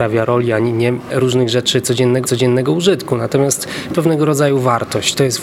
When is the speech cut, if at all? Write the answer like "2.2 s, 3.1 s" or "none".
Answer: 1.1 s, 2.2 s, 3.9 s